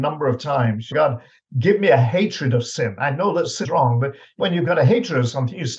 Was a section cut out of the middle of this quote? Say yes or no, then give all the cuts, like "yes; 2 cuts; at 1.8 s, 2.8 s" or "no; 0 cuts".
yes; 3 cuts; at 0.9 s, 3.6 s, 4.4 s